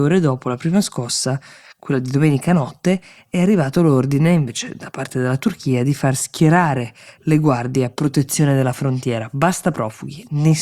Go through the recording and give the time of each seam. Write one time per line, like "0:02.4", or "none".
none